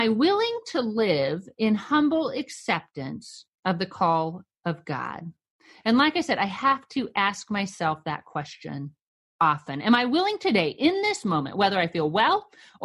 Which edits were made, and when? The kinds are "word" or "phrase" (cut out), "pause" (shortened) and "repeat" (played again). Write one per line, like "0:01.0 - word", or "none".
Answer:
0:03.6 - pause